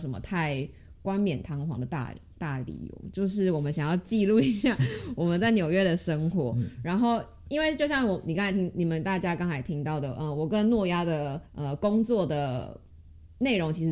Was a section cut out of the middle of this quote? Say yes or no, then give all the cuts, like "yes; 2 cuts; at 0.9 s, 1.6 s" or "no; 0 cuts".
yes; 1 cut; at 11.5 s